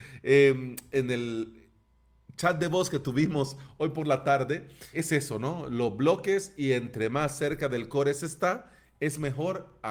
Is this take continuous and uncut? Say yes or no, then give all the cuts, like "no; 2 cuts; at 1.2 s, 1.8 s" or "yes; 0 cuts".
no; 1 cut; at 4.9 s